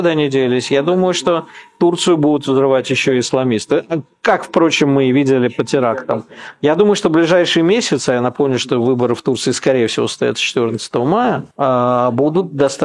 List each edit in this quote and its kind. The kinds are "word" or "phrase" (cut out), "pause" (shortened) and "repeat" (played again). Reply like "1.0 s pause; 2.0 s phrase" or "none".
11.5 s pause